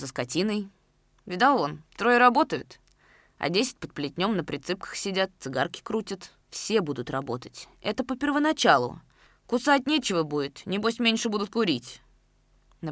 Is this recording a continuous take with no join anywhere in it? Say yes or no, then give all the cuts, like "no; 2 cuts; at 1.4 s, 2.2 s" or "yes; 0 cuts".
no; 3 cuts; at 1.9 s, 6.4 s, 9.3 s